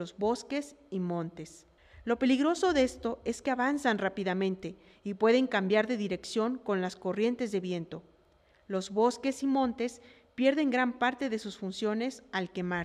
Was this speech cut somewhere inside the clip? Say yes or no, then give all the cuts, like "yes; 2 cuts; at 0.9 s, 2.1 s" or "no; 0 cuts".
no; 0 cuts